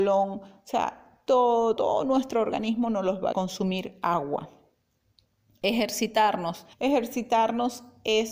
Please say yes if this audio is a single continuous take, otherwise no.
no